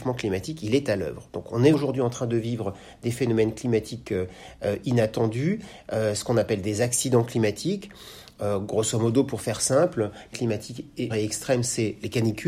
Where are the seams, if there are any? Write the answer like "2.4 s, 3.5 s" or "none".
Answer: 1.7 s, 10.3 s, 11.1 s